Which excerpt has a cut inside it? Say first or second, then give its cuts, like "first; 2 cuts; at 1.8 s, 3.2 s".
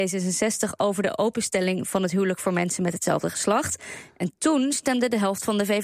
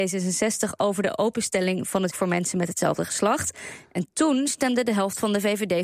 second; 1 cut; at 2.1 s